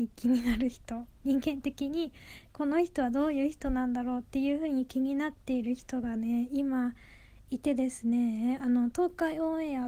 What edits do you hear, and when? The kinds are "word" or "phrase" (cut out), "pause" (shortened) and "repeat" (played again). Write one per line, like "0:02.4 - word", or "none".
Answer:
none